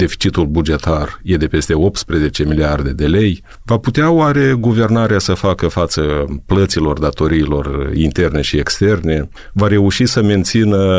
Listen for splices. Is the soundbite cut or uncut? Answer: uncut